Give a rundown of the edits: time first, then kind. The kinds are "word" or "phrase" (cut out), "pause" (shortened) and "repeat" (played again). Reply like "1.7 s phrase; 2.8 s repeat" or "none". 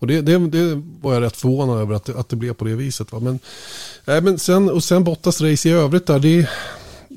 none